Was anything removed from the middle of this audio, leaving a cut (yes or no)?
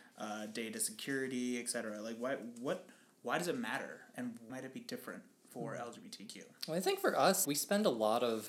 yes